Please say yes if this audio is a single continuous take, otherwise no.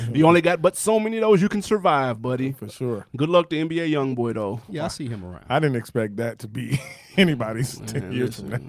yes